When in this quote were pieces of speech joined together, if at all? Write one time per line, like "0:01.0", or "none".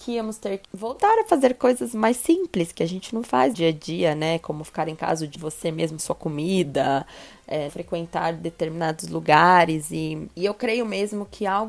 0:03.5
0:05.3
0:06.0
0:07.7